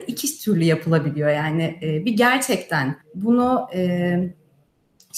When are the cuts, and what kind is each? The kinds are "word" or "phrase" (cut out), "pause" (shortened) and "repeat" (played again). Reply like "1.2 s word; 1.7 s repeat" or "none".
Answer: 3.0 s pause